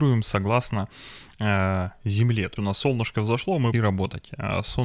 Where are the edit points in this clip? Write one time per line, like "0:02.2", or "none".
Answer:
0:02.6
0:03.7